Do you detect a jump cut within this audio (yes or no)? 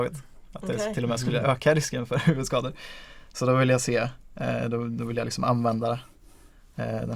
no